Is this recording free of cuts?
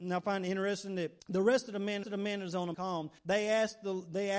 no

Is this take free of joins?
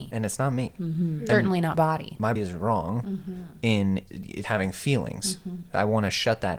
no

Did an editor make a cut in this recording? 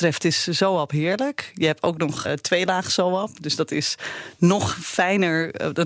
yes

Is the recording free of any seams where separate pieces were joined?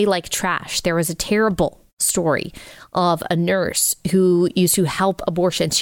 yes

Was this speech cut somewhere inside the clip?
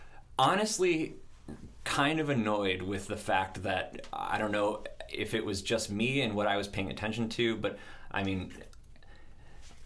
no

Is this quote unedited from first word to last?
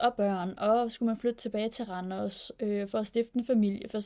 yes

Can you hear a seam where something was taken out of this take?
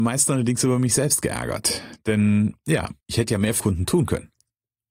yes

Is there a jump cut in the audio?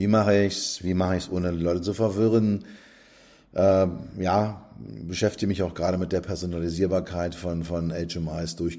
no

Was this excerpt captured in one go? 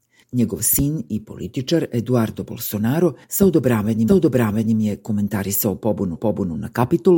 no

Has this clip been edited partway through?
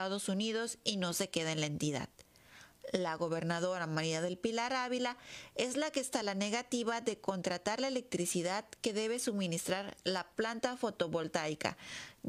no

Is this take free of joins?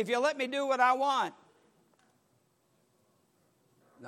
yes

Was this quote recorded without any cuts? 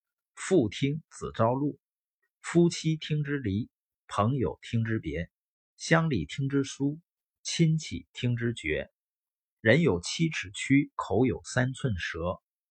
yes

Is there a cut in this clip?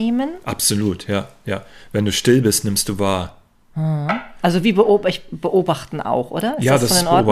no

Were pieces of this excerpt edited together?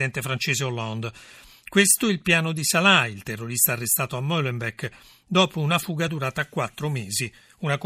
no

